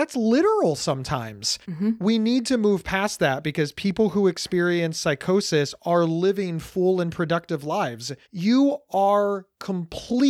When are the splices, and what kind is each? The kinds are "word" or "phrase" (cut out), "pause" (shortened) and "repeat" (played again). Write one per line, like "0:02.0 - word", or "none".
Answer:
0:01.6 - pause
0:08.2 - pause